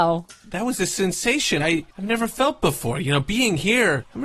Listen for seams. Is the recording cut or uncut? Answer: cut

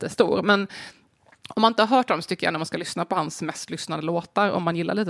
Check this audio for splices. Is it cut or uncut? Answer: uncut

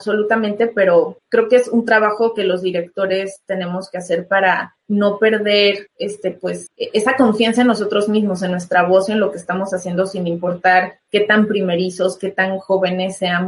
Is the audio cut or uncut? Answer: uncut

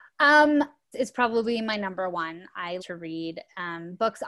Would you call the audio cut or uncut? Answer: cut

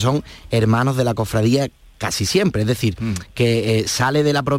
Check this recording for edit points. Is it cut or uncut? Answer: uncut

